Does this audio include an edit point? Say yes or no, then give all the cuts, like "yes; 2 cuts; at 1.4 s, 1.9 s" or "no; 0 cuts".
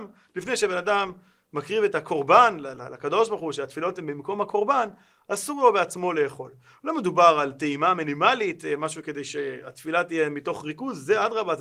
no; 0 cuts